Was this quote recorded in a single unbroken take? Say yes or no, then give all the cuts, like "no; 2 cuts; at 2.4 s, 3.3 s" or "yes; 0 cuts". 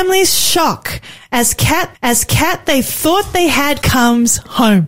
no; 2 cuts; at 1.9 s, 3.8 s